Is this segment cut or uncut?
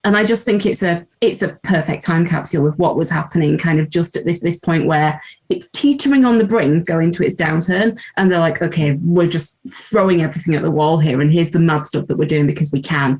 cut